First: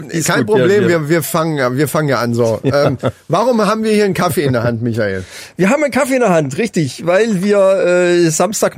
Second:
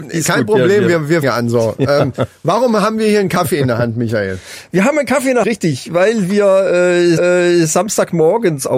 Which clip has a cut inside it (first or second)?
second